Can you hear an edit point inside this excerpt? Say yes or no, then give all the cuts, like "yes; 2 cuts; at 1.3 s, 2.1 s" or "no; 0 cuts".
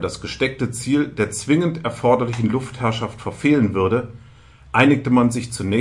no; 0 cuts